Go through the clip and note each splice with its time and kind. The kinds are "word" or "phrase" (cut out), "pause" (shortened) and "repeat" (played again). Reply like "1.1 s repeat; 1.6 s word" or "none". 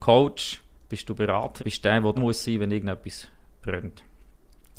1.6 s phrase; 2.2 s word